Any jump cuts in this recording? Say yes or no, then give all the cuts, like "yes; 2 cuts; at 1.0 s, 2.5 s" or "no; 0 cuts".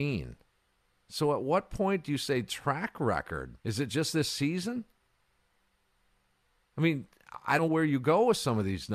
yes; 2 cuts; at 3.6 s, 7.6 s